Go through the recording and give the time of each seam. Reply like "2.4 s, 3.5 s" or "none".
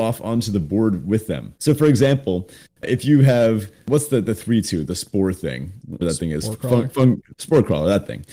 6.0 s